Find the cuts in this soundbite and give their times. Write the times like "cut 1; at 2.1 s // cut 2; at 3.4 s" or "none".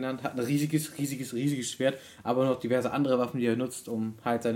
none